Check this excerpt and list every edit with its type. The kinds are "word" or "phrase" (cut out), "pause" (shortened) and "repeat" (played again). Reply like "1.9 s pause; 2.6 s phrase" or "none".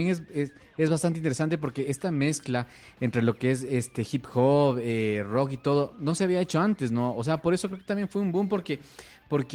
none

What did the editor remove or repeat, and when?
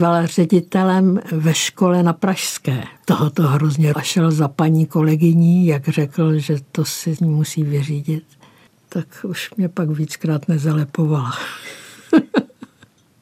3.0 s pause; 3.9 s word; 7.2 s word

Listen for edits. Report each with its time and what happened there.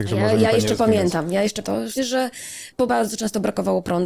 1.6 s word; 2.0 s word; 2.9 s word

